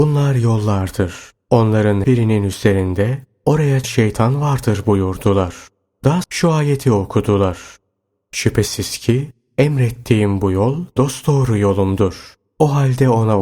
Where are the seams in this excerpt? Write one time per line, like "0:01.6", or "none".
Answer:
0:02.0
0:03.8
0:06.2
0:11.0